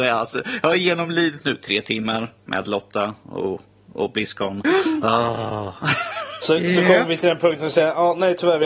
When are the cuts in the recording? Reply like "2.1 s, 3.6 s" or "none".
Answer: none